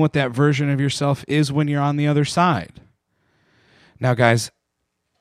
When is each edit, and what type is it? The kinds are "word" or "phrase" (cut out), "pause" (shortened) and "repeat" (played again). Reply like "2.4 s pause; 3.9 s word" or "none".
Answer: none

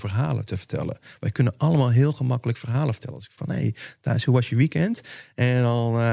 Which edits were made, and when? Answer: 3.4 s word

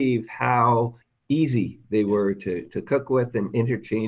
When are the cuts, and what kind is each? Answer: 1.0 s pause

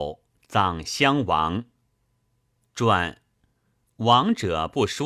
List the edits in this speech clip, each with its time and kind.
none

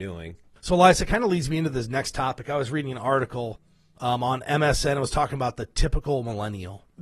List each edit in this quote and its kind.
none

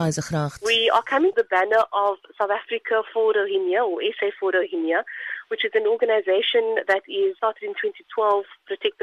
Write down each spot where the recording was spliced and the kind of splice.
1.3 s phrase; 7.4 s word

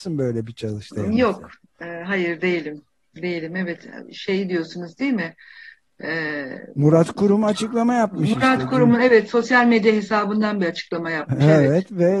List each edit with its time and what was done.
none

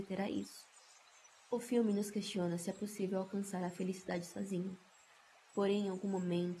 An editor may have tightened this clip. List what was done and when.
1.3 s pause

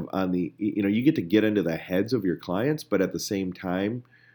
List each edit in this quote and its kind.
none

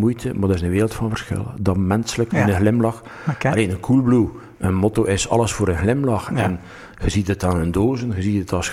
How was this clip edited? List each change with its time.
2.3 s word; 4.5 s pause

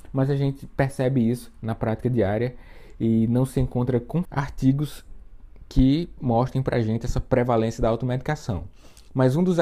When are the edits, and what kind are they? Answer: 4.2 s word

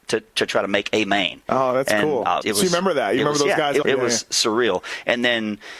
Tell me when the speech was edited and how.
2.4 s word; 3.8 s word

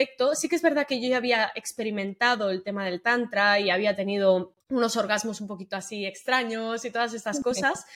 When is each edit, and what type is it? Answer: 4.6 s pause

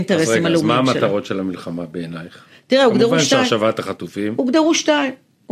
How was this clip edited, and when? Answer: none

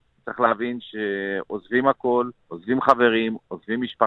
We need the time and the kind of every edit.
2.4 s pause

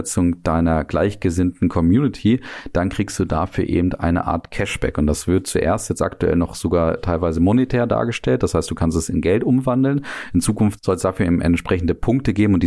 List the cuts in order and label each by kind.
none

